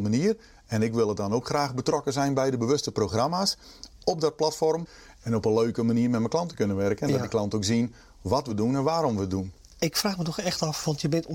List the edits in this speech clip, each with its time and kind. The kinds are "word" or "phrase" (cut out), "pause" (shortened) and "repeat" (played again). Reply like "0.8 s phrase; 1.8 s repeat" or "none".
none